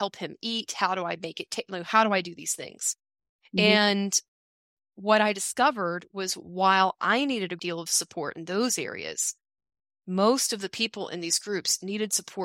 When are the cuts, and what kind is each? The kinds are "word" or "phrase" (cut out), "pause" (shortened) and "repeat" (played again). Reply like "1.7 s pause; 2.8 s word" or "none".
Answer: 7.6 s word

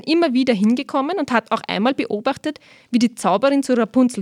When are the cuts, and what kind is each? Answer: none

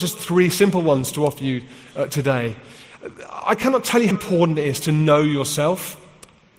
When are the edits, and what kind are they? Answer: 4.1 s word

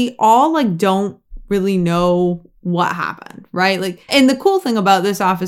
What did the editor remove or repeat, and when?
4.1 s word

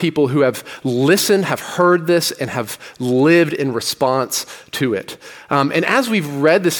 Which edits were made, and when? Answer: none

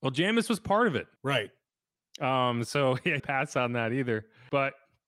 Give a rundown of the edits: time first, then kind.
1.2 s pause; 3.2 s phrase

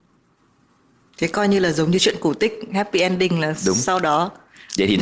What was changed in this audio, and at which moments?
none

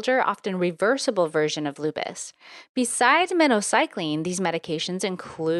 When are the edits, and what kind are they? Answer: none

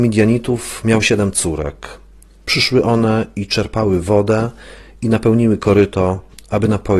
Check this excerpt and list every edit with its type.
none

